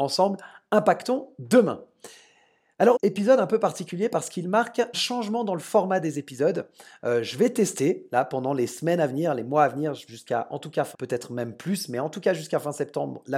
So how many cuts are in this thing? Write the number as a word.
four